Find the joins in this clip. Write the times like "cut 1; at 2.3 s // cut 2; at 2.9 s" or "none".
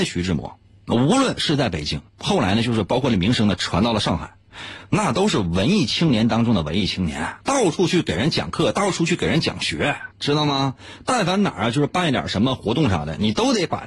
cut 1; at 2.1 s // cut 2; at 7.4 s // cut 3; at 10.1 s